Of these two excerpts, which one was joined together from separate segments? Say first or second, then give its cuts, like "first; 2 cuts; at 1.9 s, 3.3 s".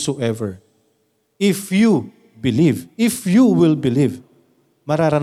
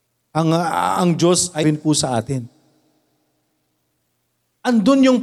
second; 1 cut; at 1.6 s